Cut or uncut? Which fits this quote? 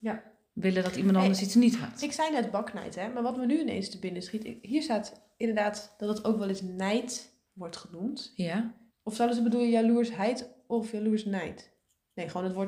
cut